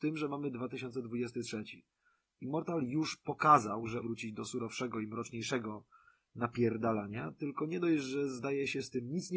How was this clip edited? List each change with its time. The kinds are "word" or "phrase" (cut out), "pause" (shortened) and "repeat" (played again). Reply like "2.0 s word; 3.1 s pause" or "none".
4.0 s word